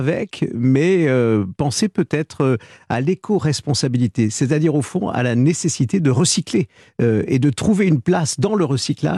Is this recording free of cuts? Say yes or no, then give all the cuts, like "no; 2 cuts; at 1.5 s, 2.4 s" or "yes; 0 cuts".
yes; 0 cuts